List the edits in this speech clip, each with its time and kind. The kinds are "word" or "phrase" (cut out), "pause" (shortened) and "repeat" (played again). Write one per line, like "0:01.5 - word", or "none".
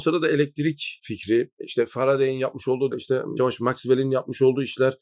0:01.5 - word
0:02.9 - word
0:03.4 - word